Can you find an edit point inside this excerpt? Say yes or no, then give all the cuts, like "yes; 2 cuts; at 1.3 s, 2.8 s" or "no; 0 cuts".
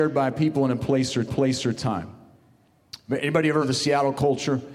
yes; 2 cuts; at 1.3 s, 3.6 s